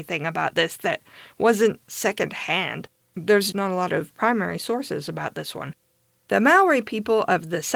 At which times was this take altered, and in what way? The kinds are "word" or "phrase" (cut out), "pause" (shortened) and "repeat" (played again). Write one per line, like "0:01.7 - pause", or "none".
0:03.5 - word